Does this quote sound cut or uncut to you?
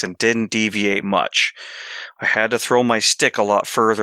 uncut